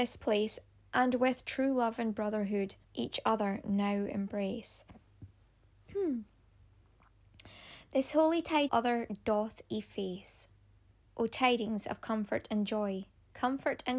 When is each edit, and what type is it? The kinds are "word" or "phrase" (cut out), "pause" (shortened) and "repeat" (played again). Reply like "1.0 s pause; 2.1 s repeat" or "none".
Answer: 2.8 s pause; 8.7 s phrase; 10.9 s pause